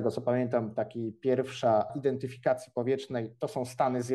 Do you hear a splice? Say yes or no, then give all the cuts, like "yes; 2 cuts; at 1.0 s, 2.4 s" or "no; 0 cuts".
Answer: yes; 1 cut; at 1.9 s